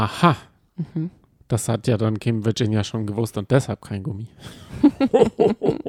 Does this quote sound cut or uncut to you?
uncut